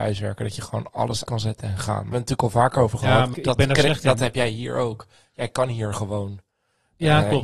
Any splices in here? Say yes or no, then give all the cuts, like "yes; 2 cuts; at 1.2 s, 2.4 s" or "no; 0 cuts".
yes; 3 cuts; at 1.2 s, 2.1 s, 3.3 s